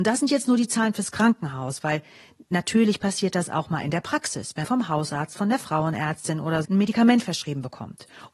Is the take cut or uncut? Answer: cut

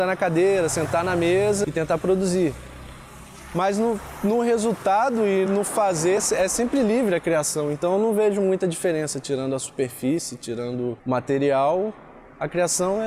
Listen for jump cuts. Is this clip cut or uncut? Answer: cut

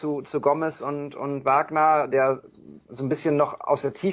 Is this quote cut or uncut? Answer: cut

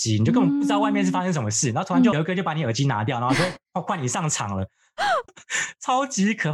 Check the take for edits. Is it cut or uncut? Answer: cut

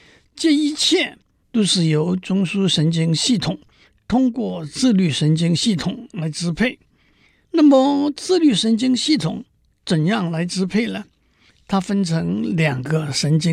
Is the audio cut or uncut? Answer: uncut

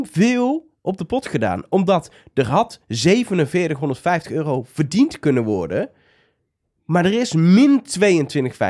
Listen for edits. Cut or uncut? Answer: uncut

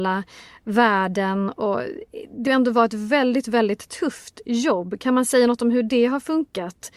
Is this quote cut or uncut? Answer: cut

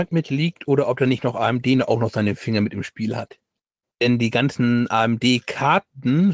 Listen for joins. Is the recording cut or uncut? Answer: uncut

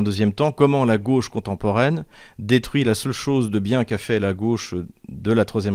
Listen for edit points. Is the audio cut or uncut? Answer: uncut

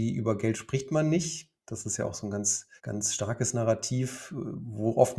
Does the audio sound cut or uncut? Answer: cut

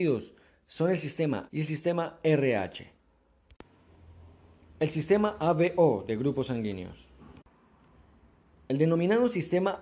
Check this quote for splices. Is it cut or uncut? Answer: cut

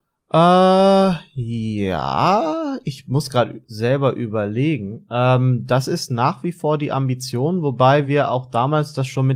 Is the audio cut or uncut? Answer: uncut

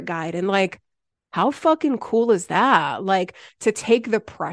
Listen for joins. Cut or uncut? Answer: uncut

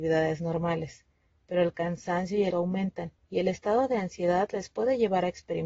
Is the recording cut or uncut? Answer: cut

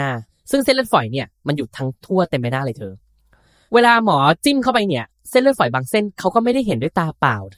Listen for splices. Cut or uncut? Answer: uncut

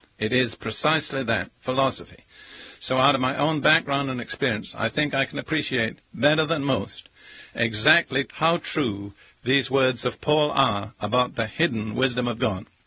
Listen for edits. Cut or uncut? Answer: uncut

